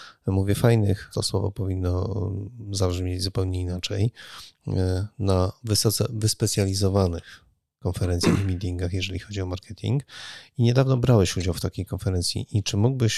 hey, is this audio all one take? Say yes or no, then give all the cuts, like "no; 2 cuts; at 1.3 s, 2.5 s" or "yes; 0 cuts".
no; 1 cut; at 1.1 s